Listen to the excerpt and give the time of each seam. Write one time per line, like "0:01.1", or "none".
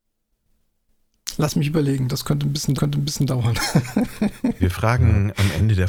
0:02.8
0:04.6